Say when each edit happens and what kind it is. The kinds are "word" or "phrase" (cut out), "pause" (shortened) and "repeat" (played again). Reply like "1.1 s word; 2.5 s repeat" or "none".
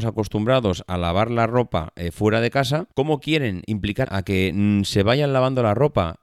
2.9 s pause; 4.0 s phrase